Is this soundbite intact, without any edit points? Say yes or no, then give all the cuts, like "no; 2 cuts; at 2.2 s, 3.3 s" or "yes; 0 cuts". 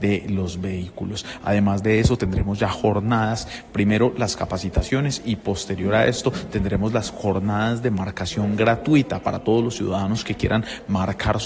yes; 0 cuts